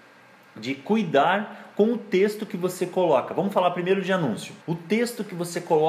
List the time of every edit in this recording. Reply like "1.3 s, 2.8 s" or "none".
4.6 s